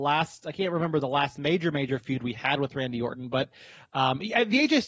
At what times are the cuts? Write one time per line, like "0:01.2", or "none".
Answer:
none